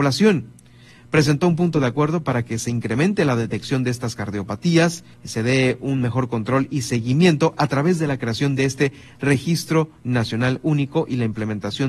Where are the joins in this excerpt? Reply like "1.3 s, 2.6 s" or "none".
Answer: 5.1 s